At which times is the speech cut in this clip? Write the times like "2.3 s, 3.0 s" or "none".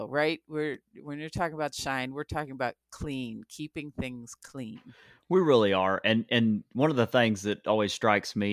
none